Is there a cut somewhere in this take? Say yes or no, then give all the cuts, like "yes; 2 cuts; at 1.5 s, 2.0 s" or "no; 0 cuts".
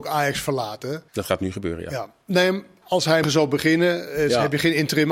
yes; 2 cuts; at 1.1 s, 3.2 s